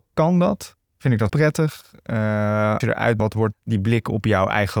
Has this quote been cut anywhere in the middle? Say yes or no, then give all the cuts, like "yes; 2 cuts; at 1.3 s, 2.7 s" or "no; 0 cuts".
yes; 4 cuts; at 1.3 s, 2.8 s, 3.2 s, 3.5 s